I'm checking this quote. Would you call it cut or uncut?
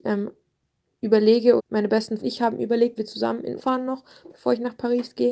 cut